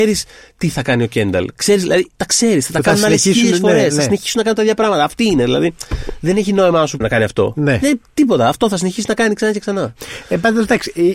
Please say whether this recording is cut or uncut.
cut